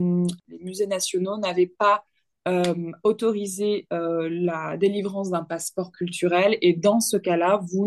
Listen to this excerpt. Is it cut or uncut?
uncut